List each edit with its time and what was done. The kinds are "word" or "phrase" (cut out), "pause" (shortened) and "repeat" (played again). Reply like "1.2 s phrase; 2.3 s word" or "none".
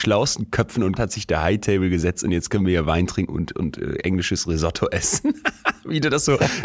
1.0 s word